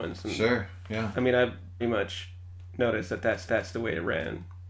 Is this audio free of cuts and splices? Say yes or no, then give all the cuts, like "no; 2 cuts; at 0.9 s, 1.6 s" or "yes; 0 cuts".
no; 2 cuts; at 1.8 s, 3.5 s